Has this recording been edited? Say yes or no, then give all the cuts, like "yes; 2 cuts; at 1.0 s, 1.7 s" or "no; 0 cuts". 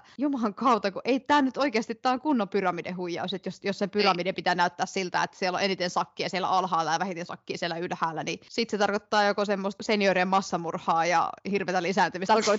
no; 0 cuts